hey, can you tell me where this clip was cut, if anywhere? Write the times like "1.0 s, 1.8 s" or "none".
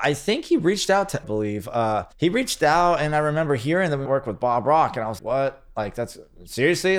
1.2 s, 2.1 s, 4.1 s, 5.2 s